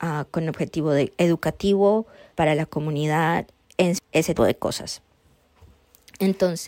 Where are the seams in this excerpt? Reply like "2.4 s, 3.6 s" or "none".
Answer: 2.3 s, 3.6 s, 4.0 s, 4.4 s